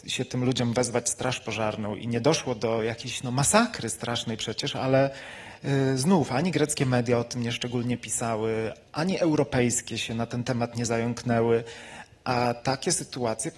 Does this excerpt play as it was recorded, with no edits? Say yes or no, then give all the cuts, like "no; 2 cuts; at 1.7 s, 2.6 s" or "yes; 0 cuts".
yes; 0 cuts